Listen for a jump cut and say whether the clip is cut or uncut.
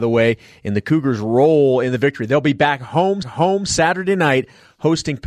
cut